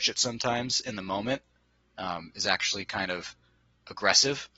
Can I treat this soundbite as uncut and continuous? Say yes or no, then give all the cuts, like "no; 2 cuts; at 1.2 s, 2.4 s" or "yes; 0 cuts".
yes; 0 cuts